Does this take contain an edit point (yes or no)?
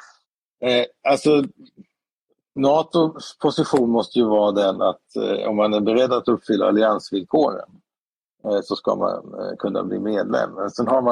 no